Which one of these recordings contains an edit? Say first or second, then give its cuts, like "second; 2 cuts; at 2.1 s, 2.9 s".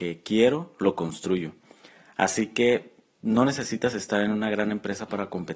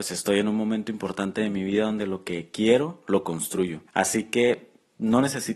second; 1 cut; at 3.9 s